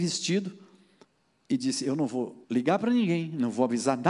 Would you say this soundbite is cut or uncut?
cut